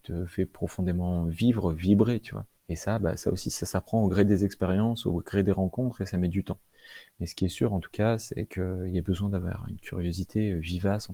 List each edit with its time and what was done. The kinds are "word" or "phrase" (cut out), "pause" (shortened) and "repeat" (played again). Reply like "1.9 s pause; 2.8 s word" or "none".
2.6 s pause